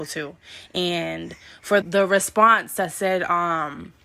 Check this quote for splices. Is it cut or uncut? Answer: cut